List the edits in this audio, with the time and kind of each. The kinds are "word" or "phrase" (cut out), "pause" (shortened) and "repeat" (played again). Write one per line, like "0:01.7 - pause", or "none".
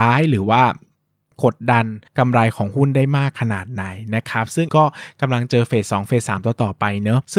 0:02.1 - pause
0:04.7 - word